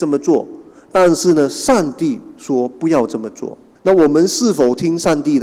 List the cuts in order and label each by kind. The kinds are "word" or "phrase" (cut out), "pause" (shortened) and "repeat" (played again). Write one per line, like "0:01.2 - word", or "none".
0:03.7 - pause